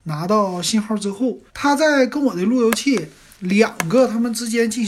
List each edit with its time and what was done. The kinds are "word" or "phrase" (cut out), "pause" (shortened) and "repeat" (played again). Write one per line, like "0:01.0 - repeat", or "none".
0:01.5 - pause

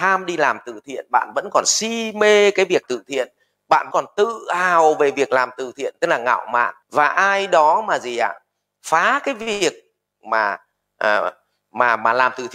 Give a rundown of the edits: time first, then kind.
0:02.8 - word
0:03.9 - word
0:06.8 - pause

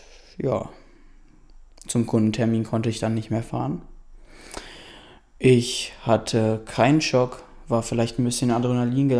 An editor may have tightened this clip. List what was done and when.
none

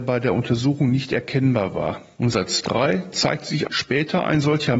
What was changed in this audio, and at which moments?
none

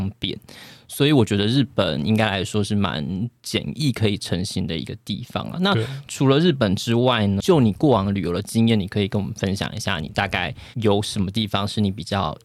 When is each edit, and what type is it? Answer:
0:10.7 - pause

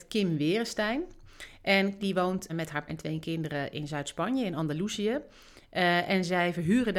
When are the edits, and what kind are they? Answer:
0:02.0 - word
0:02.5 - word
0:02.9 - word

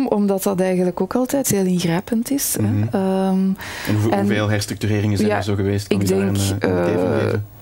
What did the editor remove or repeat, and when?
0:01.4 - word

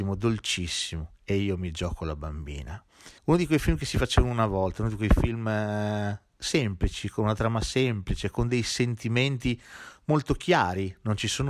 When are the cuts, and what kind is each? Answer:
0:03.2 - pause

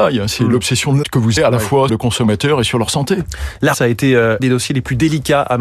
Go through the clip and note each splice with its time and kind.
0:01.0 - word
0:01.4 - word
0:01.9 - word
0:03.7 - word
0:04.4 - word

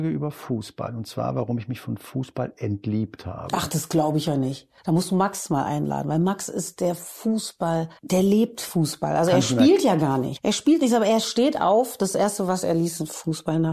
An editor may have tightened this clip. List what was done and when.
0:04.8 - pause
0:08.0 - pause

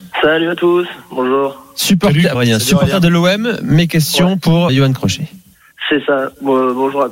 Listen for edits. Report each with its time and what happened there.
0:02.3 - word
0:04.7 - word

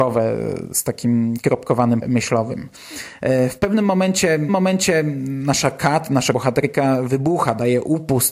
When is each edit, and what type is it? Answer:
0:02.0 - word
0:04.5 - repeat
0:06.3 - word

